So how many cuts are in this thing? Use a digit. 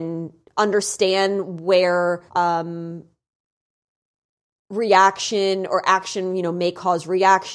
1